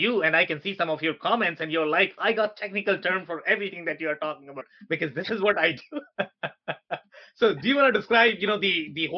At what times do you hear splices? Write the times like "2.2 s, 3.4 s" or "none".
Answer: none